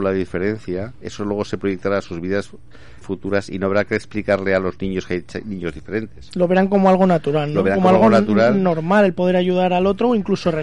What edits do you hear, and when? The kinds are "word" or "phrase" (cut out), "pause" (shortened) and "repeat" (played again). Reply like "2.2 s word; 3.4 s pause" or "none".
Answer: 3.0 s word